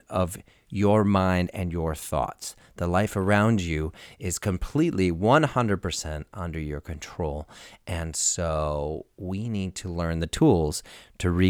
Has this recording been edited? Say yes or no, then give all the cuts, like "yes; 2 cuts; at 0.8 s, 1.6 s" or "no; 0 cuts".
no; 0 cuts